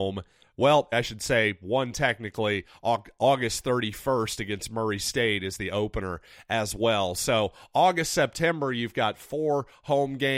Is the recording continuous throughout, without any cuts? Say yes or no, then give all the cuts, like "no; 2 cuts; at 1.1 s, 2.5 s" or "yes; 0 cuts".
no; 1 cut; at 0.9 s